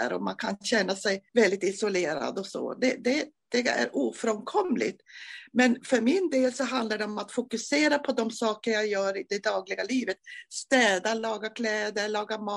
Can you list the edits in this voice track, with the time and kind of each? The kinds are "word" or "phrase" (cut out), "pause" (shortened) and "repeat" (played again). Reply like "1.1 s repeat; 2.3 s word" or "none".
1.3 s pause